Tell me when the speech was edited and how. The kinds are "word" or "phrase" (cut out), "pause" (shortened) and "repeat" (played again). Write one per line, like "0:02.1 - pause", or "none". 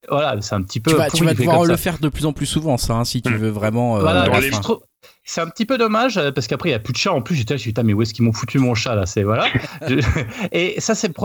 none